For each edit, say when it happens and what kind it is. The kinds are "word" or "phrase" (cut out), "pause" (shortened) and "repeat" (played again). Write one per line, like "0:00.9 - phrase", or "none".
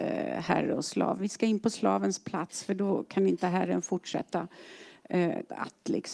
none